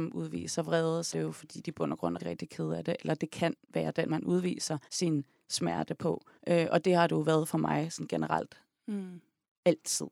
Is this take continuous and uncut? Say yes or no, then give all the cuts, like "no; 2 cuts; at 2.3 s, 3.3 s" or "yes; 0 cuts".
no; 6 cuts; at 1.1 s, 2.2 s, 3.6 s, 4.1 s, 4.9 s, 6.4 s